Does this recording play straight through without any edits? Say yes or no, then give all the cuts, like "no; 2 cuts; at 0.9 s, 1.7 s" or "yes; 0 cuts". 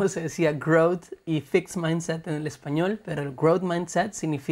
yes; 0 cuts